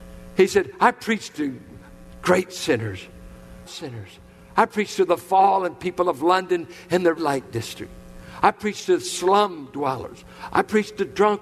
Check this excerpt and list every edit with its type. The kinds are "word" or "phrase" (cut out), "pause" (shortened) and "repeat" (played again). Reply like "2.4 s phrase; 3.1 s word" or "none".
3.7 s word; 7.2 s word

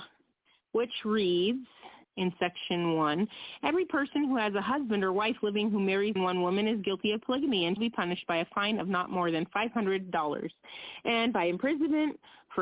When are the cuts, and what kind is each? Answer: 2.0 s pause; 6.2 s phrase; 7.8 s word

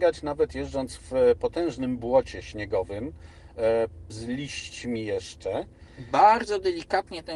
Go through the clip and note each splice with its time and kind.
4.1 s word

